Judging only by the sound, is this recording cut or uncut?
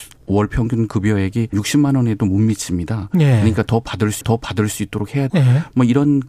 cut